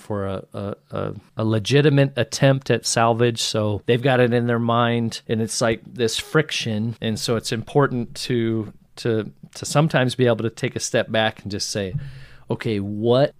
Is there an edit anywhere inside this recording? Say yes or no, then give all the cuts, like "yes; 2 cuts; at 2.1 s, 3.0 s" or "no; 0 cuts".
no; 0 cuts